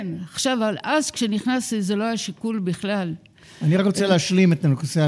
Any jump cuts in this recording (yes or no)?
no